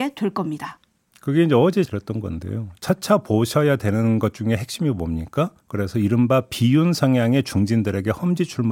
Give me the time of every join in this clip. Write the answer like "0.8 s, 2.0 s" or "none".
1.8 s, 5.6 s